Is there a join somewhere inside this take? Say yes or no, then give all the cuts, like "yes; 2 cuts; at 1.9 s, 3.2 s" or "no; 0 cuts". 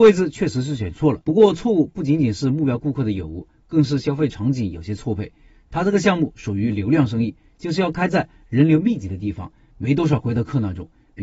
yes; 1 cut; at 1.2 s